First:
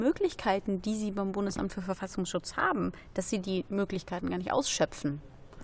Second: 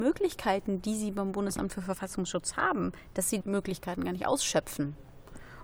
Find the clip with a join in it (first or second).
second